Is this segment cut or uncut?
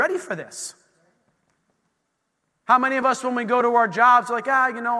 uncut